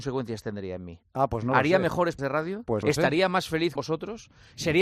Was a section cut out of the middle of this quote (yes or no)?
yes